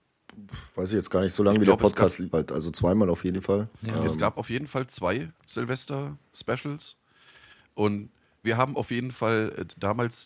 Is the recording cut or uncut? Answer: cut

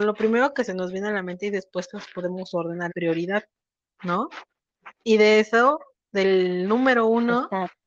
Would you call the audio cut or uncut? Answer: cut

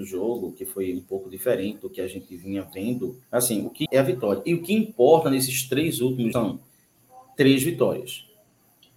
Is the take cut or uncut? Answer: cut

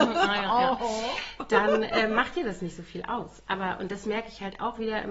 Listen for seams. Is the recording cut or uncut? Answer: uncut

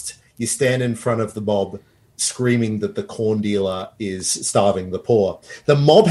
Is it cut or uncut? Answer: uncut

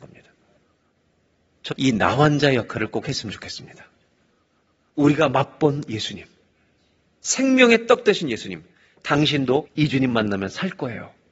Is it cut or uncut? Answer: cut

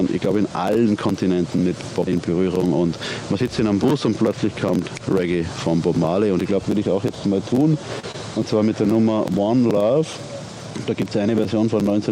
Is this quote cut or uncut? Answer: cut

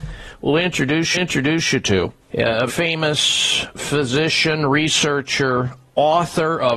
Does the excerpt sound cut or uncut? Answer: cut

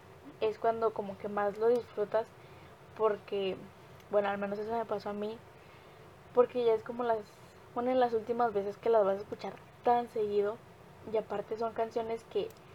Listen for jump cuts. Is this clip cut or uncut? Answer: uncut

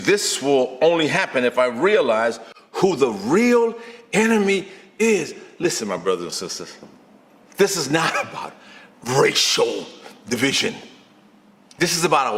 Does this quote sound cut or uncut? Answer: uncut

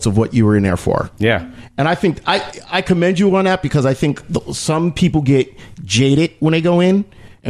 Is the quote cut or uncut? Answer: uncut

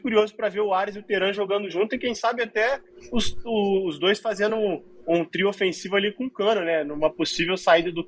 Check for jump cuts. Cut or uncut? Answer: uncut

